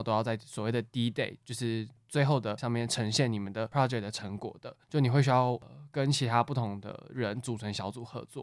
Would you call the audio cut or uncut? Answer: cut